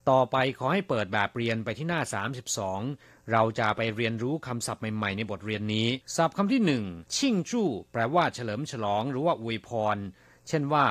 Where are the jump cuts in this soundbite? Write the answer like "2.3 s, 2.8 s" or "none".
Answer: 6.0 s, 7.1 s